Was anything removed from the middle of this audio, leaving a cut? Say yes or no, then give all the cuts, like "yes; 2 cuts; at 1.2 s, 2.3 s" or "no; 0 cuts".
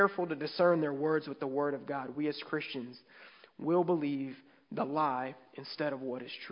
no; 0 cuts